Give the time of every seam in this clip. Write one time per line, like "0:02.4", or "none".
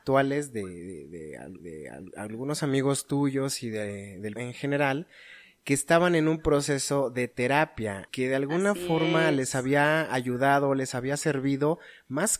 0:01.6
0:04.4
0:08.1